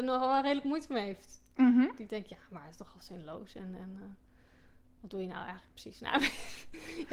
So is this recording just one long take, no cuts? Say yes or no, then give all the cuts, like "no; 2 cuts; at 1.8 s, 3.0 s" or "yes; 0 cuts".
yes; 0 cuts